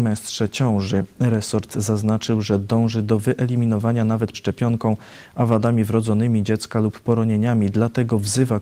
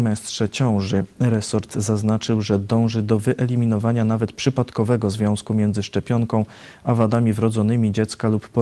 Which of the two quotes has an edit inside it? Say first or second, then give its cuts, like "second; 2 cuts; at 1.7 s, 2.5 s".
first; 1 cut; at 4.3 s